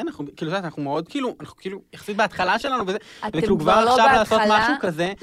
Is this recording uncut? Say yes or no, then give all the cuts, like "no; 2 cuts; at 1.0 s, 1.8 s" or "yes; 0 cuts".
yes; 0 cuts